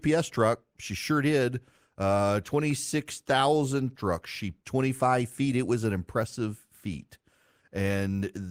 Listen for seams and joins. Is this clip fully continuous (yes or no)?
no